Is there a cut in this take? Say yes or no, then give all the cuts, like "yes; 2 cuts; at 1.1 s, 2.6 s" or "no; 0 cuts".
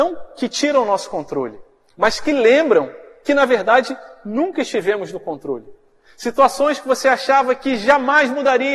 no; 0 cuts